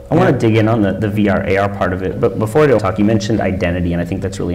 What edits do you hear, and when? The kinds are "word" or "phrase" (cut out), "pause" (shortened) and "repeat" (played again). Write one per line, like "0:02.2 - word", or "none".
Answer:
0:02.1 - word
0:02.8 - word